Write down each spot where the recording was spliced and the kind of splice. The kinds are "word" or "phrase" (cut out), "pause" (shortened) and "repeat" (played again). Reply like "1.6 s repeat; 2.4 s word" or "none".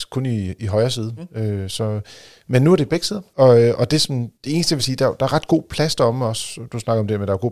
none